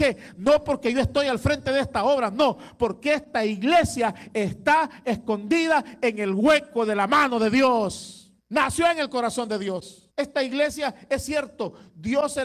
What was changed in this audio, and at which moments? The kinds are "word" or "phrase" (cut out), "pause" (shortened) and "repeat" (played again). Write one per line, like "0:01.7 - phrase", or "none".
0:08.4 - pause
0:10.1 - pause